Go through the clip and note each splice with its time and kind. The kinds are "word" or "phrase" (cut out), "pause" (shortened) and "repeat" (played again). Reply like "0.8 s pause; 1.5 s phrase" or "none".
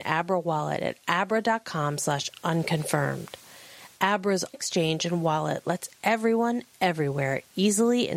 4.5 s word